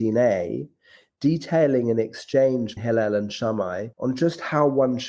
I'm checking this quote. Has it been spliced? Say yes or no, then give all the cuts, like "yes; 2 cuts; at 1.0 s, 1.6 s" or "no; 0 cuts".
yes; 2 cuts; at 2.8 s, 3.9 s